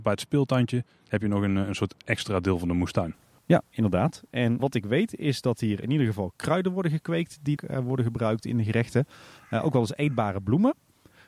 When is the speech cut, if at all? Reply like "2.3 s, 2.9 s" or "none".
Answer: 4.6 s, 5.8 s, 7.6 s